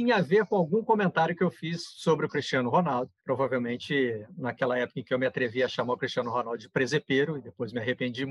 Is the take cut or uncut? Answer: cut